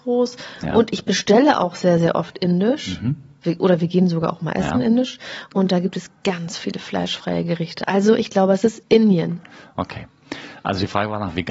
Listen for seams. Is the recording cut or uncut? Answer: uncut